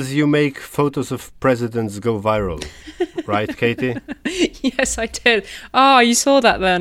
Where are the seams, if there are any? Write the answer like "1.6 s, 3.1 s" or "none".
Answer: none